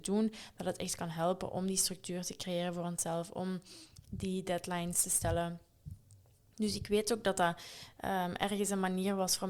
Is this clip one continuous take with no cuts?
yes; 0 cuts

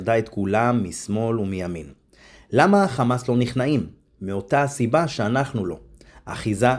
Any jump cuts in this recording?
no; 0 cuts

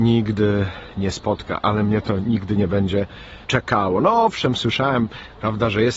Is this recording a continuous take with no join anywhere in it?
no; 1 cut; at 3.4 s

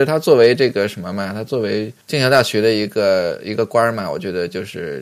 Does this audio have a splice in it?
yes; 1 cut; at 2.0 s

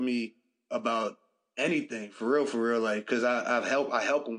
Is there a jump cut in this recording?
no; 0 cuts

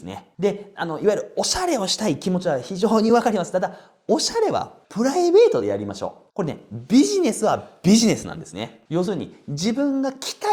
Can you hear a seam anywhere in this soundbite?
yes; 2 cuts; at 4.8 s, 6.3 s

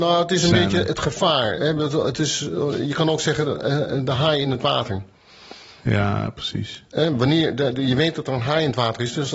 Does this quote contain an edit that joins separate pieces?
no; 0 cuts

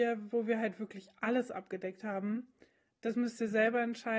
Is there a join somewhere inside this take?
no; 0 cuts

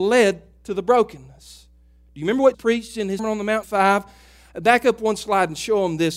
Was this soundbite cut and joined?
yes; 3 cuts; at 2.5 s, 3.2 s, 3.6 s

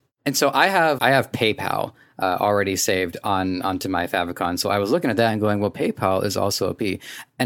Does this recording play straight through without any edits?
no; 1 cut; at 1.0 s

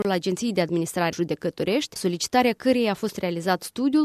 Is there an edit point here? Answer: yes; 2 cuts; at 1.1 s, 2.0 s

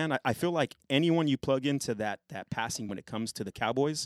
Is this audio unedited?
no; 1 cut; at 2.9 s

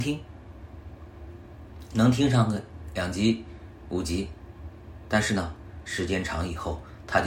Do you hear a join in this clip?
no; 0 cuts

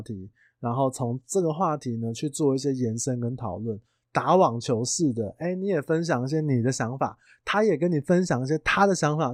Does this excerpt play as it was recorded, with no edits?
yes; 0 cuts

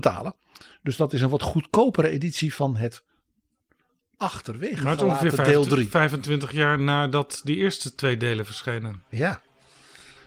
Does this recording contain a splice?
no; 0 cuts

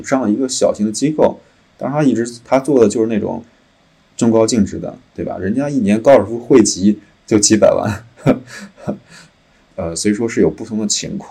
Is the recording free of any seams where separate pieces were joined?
yes; 0 cuts

